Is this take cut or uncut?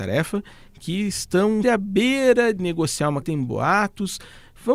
cut